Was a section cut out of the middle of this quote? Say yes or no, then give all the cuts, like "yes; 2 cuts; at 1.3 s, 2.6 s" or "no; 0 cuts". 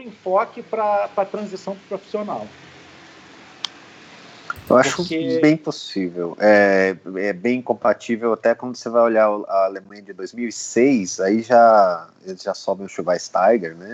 no; 0 cuts